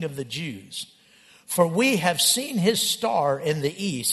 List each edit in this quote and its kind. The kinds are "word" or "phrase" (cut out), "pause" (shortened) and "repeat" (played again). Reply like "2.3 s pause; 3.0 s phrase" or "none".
none